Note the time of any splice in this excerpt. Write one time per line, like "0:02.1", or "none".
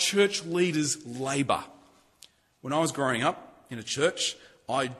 none

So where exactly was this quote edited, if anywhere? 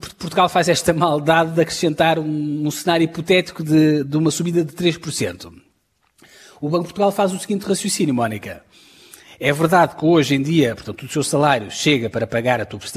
none

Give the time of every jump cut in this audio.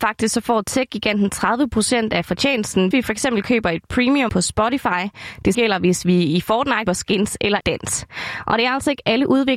0:02.9
0:04.3
0:05.5
0:06.9
0:07.6

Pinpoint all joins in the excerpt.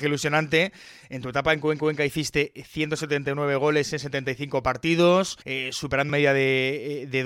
0:01.8
0:05.4
0:06.1

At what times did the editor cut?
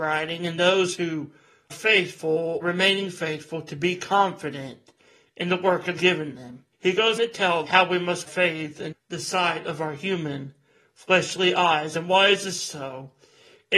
0:01.7
0:02.6
0:06.0
0:06.7
0:07.2
0:07.7
0:08.3
0:08.9

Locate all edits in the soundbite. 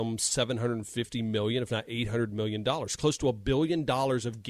none

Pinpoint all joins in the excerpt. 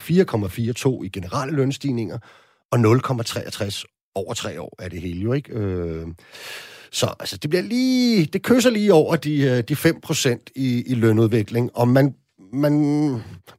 none

